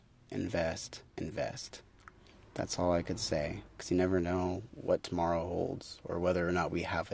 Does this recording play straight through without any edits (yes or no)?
no